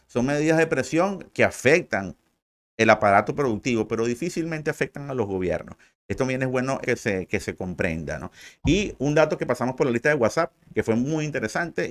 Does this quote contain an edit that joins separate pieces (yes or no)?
yes